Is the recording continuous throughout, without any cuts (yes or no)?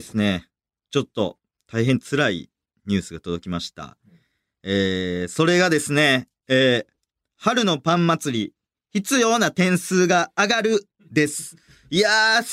yes